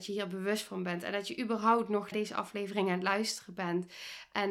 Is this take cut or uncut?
cut